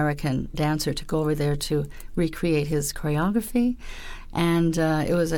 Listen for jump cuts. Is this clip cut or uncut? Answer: uncut